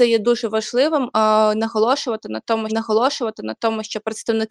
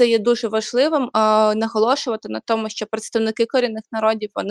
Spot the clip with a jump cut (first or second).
first